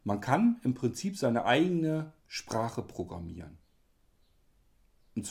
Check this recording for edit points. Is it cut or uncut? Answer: cut